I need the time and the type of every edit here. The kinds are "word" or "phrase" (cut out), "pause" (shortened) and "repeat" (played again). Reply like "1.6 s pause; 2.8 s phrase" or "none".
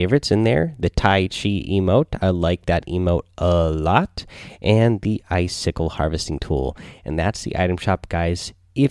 none